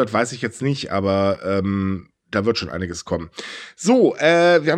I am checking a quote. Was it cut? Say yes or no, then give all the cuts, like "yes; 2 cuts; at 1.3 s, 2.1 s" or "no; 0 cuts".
no; 0 cuts